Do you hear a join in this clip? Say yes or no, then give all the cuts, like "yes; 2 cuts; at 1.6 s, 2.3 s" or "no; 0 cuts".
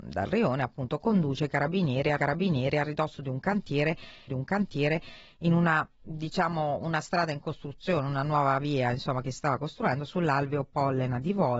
yes; 2 cuts; at 2.2 s, 4.3 s